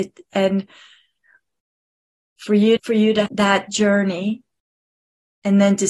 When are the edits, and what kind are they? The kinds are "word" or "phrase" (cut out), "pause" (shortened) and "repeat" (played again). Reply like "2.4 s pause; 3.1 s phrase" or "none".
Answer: 2.8 s word; 3.3 s word